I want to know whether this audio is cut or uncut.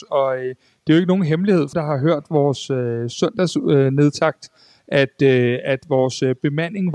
cut